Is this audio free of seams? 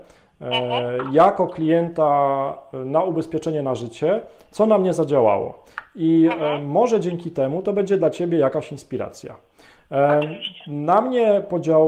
yes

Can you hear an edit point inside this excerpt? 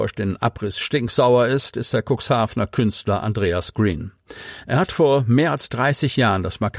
no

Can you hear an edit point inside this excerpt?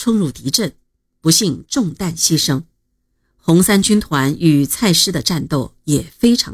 no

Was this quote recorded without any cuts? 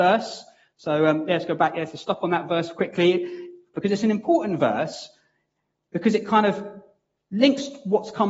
yes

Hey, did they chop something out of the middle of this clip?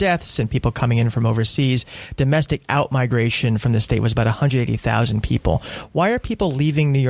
no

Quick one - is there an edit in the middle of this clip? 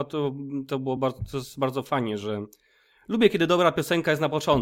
no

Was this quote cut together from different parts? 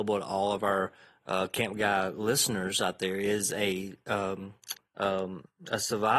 yes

